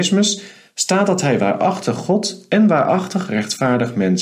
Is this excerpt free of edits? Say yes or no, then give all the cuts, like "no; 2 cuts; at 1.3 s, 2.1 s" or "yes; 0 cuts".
yes; 0 cuts